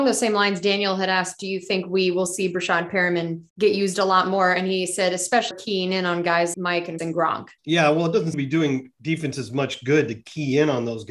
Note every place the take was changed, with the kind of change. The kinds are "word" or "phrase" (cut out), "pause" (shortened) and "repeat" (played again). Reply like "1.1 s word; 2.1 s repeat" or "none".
3.5 s pause; 5.5 s phrase; 6.5 s word; 7.0 s word; 7.6 s pause; 8.3 s word